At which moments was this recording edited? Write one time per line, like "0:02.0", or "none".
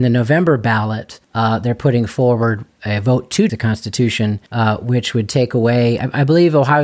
0:01.2
0:03.5
0:04.5